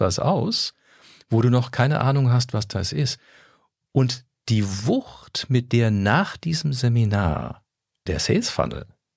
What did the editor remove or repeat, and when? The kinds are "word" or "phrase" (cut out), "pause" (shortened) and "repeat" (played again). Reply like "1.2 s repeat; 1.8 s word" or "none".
8.1 s word